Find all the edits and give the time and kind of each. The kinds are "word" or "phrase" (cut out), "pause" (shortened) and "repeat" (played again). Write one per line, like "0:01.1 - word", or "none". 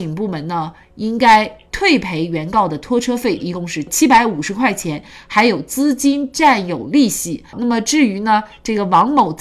0:03.4 - phrase
0:07.5 - pause